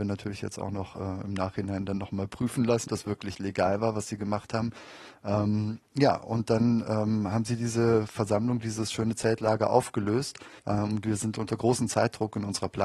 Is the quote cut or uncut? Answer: cut